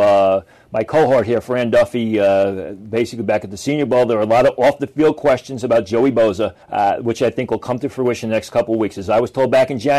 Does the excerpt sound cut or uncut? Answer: cut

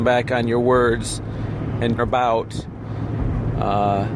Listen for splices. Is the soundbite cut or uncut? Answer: cut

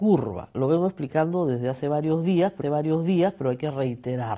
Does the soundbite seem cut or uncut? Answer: cut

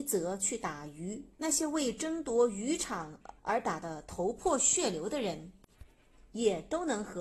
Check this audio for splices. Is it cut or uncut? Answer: cut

